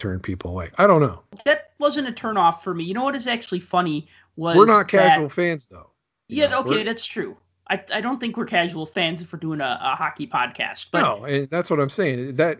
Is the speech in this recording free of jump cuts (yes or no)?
yes